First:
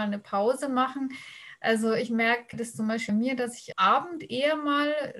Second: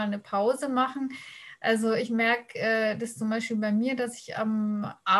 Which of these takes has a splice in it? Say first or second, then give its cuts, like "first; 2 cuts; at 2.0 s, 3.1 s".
first; 3 cuts; at 2.5 s, 3.1 s, 3.7 s